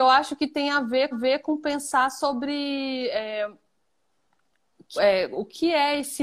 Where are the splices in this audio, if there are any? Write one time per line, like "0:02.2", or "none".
0:01.1
0:05.0